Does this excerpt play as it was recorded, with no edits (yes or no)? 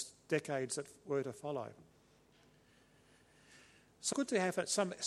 no